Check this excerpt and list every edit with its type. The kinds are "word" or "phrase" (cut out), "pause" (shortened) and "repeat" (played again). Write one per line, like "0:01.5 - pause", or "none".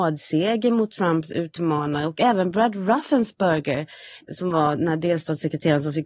0:04.2 - word